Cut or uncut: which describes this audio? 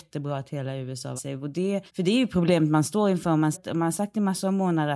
cut